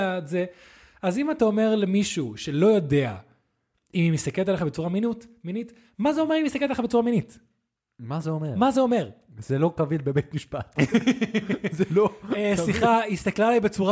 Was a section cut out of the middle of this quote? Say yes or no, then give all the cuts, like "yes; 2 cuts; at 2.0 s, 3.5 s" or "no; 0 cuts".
no; 0 cuts